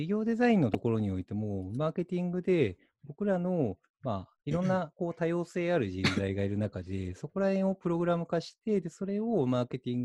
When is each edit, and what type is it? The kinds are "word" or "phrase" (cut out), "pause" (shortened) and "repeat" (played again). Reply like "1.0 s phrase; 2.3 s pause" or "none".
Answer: 4.4 s pause